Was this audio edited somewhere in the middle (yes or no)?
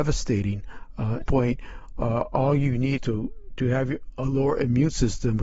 yes